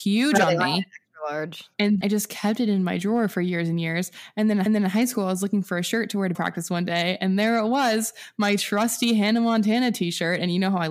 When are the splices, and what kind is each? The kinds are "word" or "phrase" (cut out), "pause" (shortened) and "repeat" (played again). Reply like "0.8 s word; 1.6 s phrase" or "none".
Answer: 2.0 s word; 4.7 s repeat; 6.3 s word

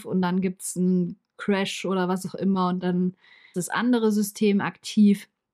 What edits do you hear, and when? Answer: 3.5 s word

